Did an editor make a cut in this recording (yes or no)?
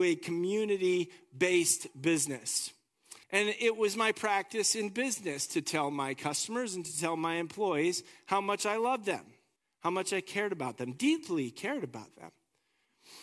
yes